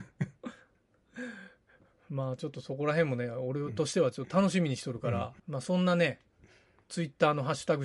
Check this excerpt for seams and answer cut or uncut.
cut